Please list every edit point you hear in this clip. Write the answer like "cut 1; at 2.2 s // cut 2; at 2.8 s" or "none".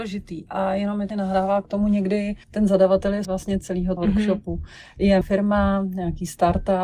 cut 1; at 1.1 s // cut 2; at 2.4 s // cut 3; at 3.2 s // cut 4; at 4.0 s // cut 5; at 5.2 s